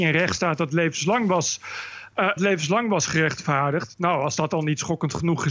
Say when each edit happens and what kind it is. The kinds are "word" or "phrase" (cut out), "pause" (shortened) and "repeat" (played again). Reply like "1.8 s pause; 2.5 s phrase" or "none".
2.4 s word